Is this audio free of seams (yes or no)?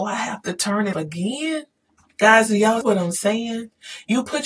no